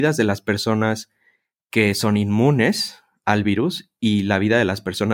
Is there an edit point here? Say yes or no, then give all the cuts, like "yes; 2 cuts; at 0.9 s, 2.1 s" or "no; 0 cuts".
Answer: no; 0 cuts